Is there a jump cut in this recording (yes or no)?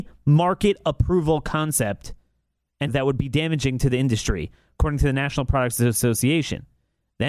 yes